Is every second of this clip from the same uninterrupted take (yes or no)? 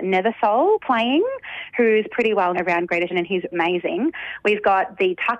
no